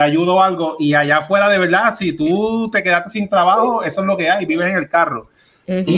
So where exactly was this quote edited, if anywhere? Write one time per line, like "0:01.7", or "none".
none